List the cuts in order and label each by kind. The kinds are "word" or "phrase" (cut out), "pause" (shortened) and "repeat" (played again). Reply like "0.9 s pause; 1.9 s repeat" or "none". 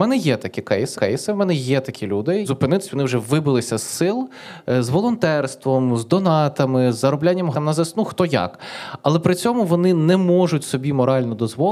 0.9 s repeat; 2.4 s phrase; 7.5 s word